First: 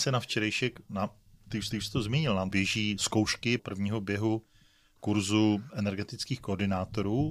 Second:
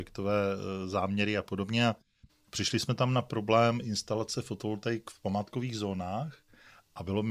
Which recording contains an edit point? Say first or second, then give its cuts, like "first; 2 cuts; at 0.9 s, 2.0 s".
first; 4 cuts; at 1.7 s, 2.5 s, 3.6 s, 5.7 s